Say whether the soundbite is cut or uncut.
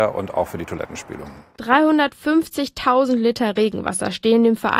uncut